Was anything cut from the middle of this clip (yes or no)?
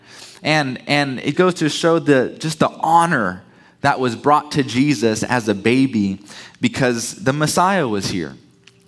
yes